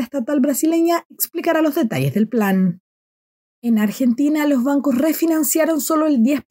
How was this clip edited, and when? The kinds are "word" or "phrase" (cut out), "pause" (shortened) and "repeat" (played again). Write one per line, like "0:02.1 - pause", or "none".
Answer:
none

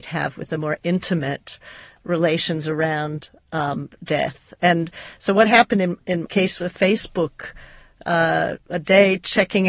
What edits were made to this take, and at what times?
0:06.2 - word
0:06.6 - word

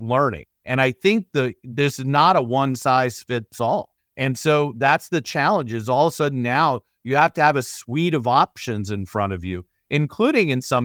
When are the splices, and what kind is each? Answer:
0:04.0 - pause

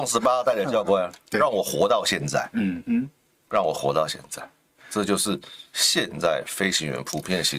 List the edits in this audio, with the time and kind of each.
none

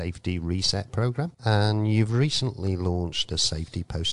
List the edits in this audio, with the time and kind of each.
0:01.3 - pause

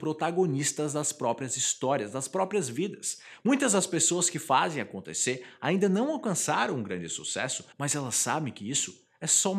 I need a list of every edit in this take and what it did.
0:07.7 - pause

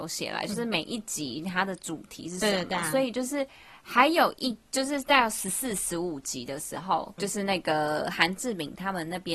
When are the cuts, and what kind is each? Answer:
0:07.2 - word

